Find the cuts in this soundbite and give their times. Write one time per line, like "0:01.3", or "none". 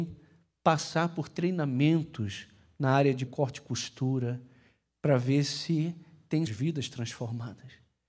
0:03.3
0:06.5